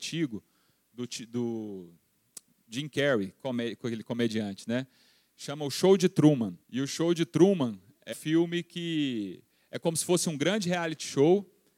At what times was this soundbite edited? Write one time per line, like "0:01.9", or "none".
0:06.6
0:08.1

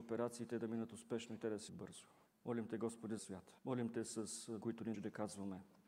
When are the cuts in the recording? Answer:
0:01.7
0:02.3
0:03.2
0:03.6
0:04.6
0:04.9

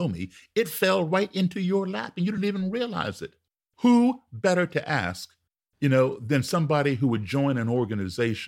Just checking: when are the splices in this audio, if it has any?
none

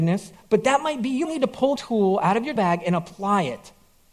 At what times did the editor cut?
0:01.2
0:01.8
0:02.6

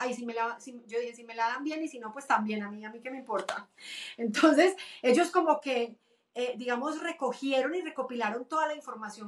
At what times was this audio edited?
none

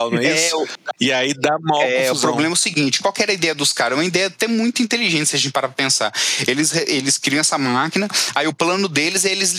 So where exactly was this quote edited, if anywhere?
none

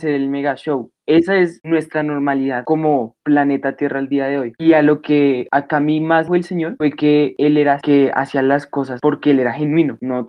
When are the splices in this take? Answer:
0:06.3
0:07.8

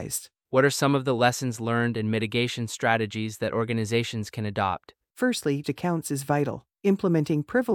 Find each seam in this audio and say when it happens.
0:05.6

